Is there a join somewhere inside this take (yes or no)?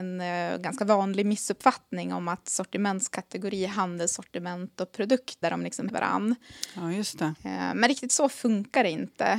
yes